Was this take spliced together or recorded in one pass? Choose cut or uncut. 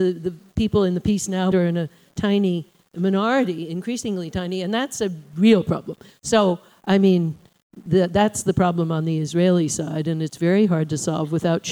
cut